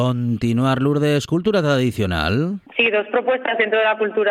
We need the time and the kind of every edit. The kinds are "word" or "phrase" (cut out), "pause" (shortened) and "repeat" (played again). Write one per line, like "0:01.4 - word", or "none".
0:02.7 - pause